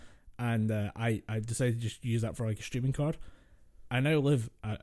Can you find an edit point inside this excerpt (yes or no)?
no